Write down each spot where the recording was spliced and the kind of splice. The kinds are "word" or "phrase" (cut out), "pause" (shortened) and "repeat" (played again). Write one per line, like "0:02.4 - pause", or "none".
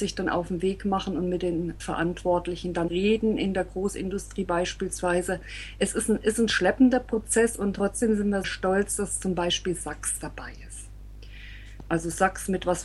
0:01.8 - word
0:02.9 - word
0:08.4 - word